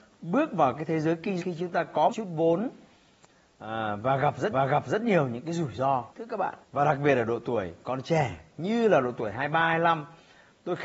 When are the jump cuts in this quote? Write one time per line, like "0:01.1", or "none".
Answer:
0:01.4
0:02.1
0:04.5
0:06.1
0:06.6